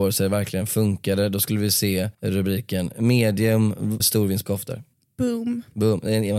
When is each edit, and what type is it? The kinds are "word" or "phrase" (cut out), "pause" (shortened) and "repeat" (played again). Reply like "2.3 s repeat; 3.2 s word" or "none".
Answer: 2.1 s pause; 4.0 s word; 4.5 s phrase